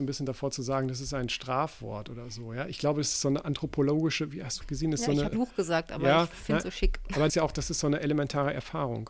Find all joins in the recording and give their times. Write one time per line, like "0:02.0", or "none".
0:04.6
0:05.3
0:06.6
0:07.3